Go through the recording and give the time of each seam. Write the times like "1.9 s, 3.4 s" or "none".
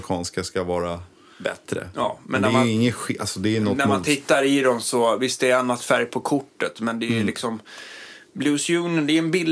none